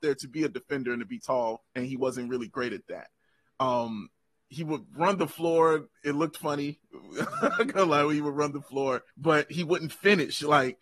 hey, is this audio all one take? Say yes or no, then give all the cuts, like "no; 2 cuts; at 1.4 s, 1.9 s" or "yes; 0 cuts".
no; 3 cuts; at 1.7 s, 6.0 s, 9.1 s